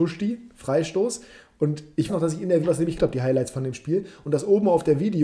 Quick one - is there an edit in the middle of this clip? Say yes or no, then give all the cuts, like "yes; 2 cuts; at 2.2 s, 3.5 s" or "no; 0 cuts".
yes; 3 cuts; at 2.1 s, 2.6 s, 3.0 s